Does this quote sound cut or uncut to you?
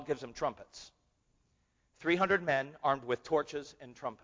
uncut